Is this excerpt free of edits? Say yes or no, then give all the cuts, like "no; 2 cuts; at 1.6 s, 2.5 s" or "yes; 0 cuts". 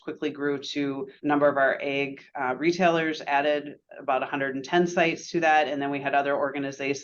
no; 1 cut; at 1.2 s